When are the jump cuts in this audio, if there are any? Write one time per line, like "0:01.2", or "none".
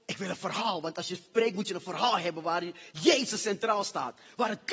none